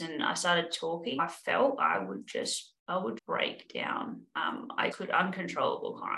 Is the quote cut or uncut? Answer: cut